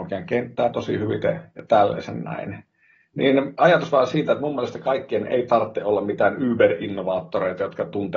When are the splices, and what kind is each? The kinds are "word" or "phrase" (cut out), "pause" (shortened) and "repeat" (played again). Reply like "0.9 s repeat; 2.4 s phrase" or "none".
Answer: none